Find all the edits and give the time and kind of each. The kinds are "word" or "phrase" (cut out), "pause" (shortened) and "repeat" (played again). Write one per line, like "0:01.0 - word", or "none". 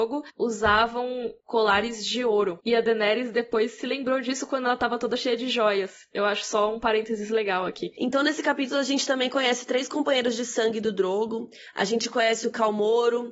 none